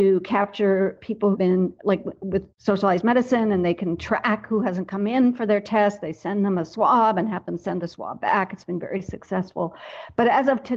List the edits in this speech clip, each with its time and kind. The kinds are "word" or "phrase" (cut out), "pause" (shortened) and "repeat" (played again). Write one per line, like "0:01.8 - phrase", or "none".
0:01.3 - phrase
0:02.5 - pause